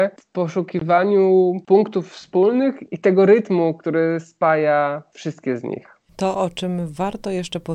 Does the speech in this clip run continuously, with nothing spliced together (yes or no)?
no